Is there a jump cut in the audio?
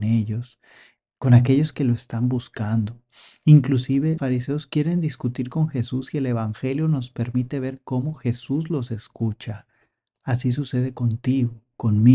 yes; 1 cut; at 4.2 s

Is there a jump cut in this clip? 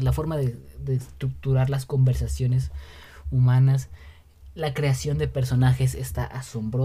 no; 0 cuts

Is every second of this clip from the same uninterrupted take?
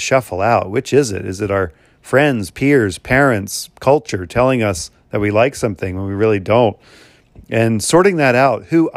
yes; 0 cuts

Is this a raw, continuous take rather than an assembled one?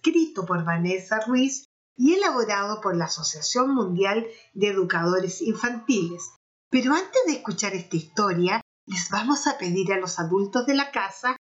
yes; 0 cuts

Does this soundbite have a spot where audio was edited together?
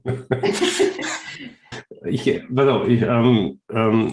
yes; 1 cut; at 1.7 s

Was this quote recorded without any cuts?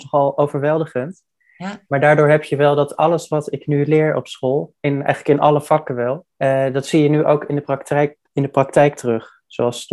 no; 1 cut; at 6.3 s

